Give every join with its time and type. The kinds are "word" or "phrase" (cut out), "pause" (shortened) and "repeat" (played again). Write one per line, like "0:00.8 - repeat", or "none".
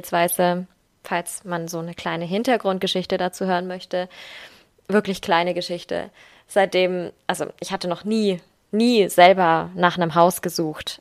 none